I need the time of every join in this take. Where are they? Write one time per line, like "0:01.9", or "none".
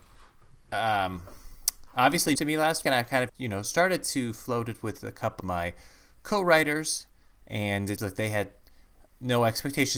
0:02.4
0:02.8
0:03.3
0:05.4
0:08.0